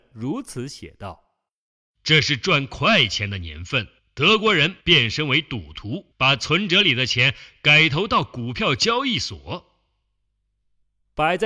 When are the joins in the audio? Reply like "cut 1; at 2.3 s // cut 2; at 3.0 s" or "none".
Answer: cut 1; at 1.5 s // cut 2; at 4.0 s // cut 3; at 4.8 s // cut 4; at 6.1 s